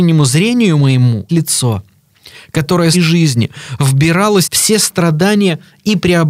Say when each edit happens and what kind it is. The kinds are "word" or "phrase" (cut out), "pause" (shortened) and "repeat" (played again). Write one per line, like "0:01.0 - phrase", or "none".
0:01.3 - word
0:02.9 - phrase
0:04.4 - word